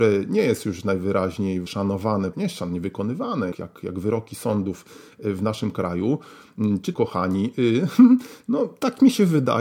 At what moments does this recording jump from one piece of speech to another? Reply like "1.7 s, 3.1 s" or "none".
1.7 s, 2.3 s, 3.5 s, 6.9 s